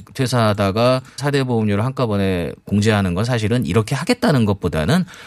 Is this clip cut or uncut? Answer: cut